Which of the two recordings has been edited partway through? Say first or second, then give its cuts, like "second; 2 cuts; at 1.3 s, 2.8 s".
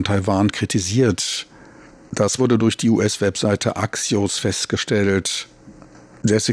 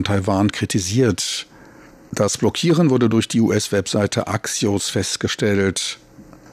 first; 1 cut; at 2.4 s